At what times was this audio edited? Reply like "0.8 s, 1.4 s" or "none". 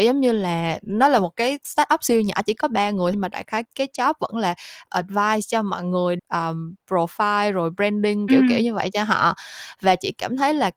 3.1 s, 3.6 s, 4.9 s, 6.2 s, 8.3 s